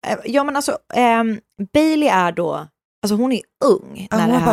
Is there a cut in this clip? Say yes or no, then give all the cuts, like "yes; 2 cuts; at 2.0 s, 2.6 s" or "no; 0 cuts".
no; 0 cuts